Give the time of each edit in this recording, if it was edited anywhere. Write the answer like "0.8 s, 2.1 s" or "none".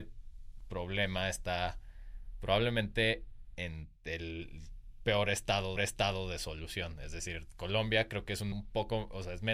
4.0 s, 5.8 s, 8.5 s